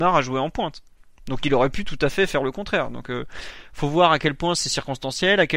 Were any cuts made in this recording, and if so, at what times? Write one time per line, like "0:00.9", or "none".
none